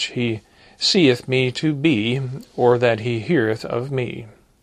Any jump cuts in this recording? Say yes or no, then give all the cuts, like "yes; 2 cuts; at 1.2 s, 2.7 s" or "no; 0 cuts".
no; 0 cuts